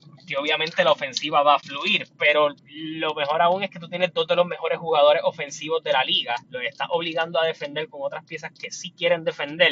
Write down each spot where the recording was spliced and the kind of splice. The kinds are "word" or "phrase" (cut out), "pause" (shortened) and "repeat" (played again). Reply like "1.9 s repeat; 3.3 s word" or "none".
2.6 s pause